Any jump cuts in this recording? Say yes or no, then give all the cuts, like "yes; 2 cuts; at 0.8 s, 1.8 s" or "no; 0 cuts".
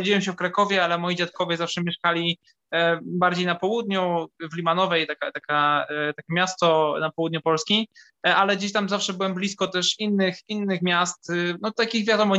no; 0 cuts